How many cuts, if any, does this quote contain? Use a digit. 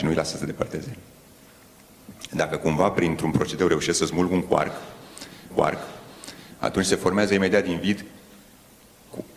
1